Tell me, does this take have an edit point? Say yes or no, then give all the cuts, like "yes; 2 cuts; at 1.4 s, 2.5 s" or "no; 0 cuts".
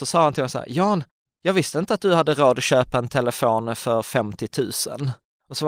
no; 0 cuts